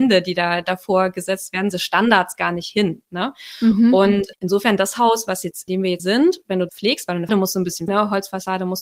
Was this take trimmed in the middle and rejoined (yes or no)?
yes